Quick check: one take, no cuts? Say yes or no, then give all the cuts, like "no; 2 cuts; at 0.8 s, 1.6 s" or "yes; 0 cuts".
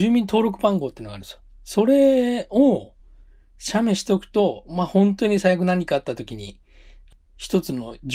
yes; 0 cuts